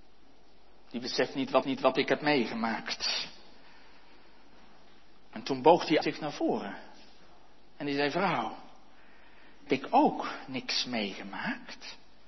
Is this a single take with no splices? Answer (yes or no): no